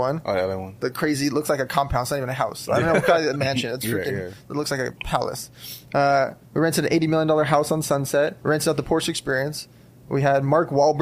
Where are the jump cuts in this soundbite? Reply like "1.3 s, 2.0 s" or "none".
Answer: 8.4 s